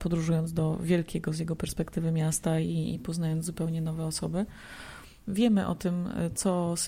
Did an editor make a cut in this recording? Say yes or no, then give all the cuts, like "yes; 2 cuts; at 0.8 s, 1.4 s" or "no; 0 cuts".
no; 0 cuts